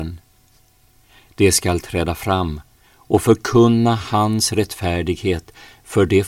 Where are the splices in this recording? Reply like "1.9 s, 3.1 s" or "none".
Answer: none

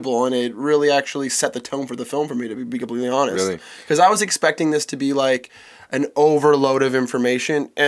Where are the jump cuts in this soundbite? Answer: none

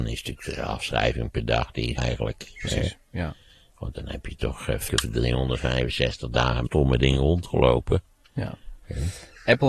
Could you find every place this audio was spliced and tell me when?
2.0 s, 4.9 s, 6.7 s

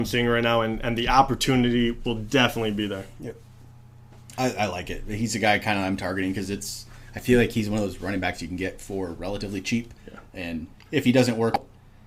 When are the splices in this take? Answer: 10.0 s, 10.7 s

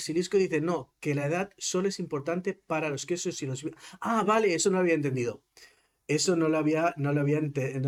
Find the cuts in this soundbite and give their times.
none

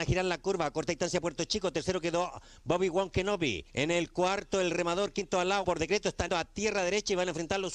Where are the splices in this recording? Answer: 3.7 s, 5.6 s, 6.3 s

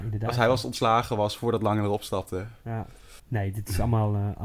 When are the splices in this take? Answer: 3.2 s

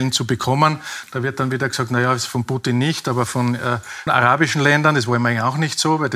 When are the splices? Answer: 4.1 s

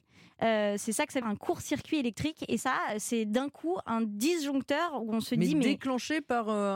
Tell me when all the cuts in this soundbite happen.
1.2 s, 2.6 s

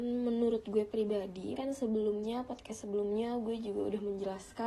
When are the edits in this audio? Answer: 1.6 s

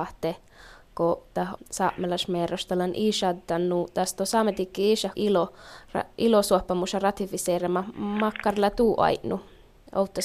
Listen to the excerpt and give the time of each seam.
1.6 s, 5.1 s

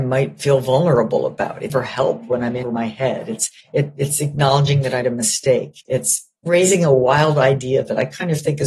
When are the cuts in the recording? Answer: 1.7 s, 2.6 s, 3.6 s, 5.0 s

